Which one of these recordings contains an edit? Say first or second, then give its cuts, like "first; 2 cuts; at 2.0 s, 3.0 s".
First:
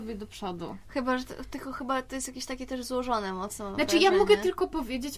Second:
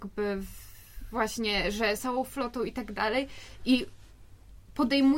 second; 1 cut; at 2.0 s